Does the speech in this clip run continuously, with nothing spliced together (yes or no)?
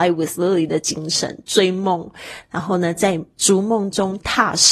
no